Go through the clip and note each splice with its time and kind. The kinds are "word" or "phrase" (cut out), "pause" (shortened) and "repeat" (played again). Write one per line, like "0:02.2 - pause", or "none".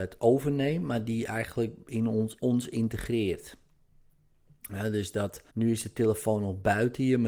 0:02.4 - word
0:05.5 - pause